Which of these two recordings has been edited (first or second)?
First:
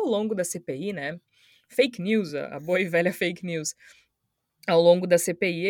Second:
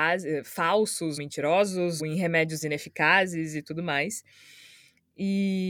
second